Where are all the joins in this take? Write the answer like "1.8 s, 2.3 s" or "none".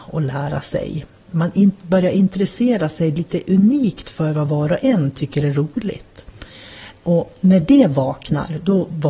none